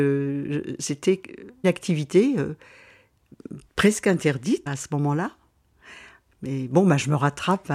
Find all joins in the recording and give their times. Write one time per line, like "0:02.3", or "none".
0:01.6
0:04.7